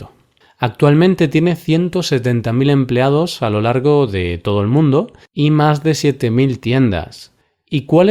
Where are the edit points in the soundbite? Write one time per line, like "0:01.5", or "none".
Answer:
0:05.3